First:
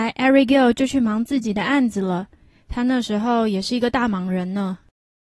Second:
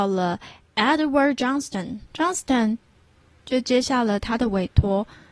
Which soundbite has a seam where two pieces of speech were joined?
second; 1 cut; at 2.0 s

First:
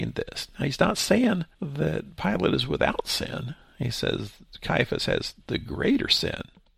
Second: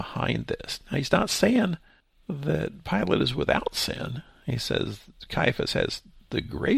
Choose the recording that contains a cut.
first; 2 cuts; at 1.5 s, 5.4 s

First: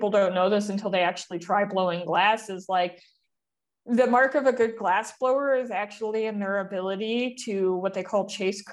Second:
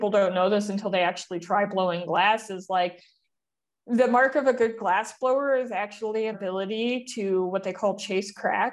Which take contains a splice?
second; 1 cut; at 6.3 s

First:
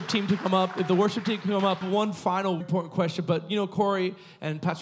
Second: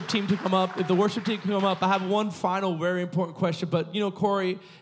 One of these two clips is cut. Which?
first; 2 cuts; at 1.8 s, 2.6 s

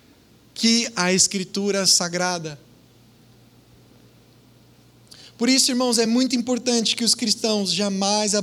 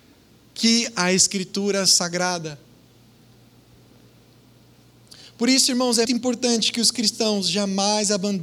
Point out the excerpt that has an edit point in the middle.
second; 1 cut; at 6.1 s

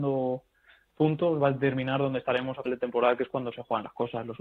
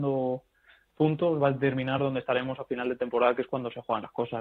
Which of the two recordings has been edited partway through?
first; 1 cut; at 2.7 s

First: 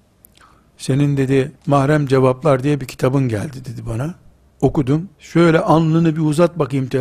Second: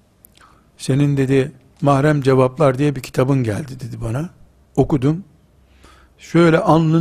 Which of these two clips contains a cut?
first; 2 cuts; at 1.5 s, 5.1 s

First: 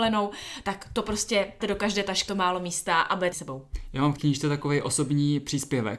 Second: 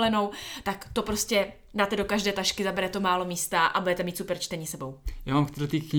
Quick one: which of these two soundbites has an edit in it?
first; 4 cuts; at 1.6 s, 2.3 s, 3.3 s, 4.2 s

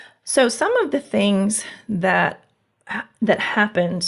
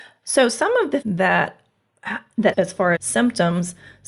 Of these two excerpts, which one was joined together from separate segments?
second; 3 cuts; at 1.0 s, 2.5 s, 3.0 s

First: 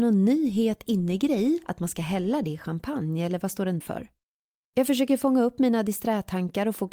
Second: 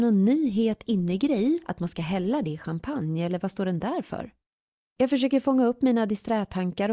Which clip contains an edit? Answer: first; 1 cut; at 3.8 s

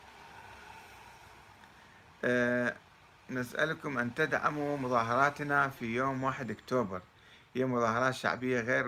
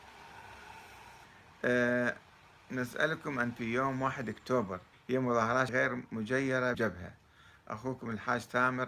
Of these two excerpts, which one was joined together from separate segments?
second; 5 cuts; at 1.2 s, 3.6 s, 4.9 s, 5.7 s, 6.7 s

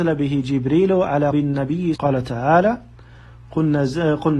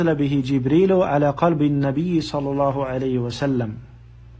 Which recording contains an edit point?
first; 2 cuts; at 1.3 s, 2.0 s

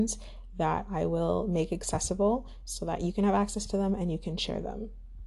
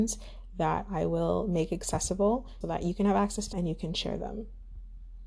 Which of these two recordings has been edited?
second; 2 cuts; at 2.6 s, 3.5 s

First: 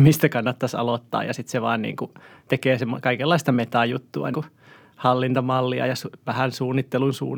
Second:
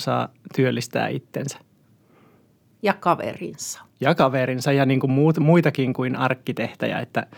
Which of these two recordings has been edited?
first; 1 cut; at 4.3 s

